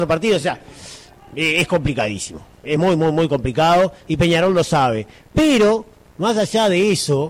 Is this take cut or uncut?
uncut